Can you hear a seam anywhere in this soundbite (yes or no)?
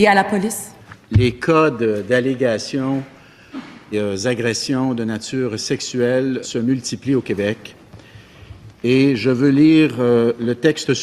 yes